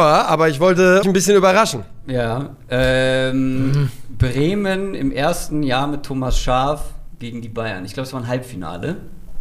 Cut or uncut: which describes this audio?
cut